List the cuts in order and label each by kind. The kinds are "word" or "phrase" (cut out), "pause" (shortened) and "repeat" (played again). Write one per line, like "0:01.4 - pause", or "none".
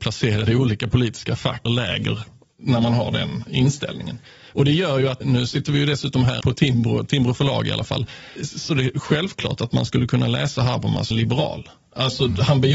0:01.7 - word
0:05.2 - word
0:06.4 - word
0:08.4 - word
0:11.1 - word